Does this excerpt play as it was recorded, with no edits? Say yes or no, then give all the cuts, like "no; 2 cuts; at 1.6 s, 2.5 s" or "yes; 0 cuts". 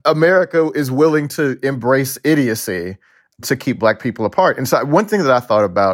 yes; 0 cuts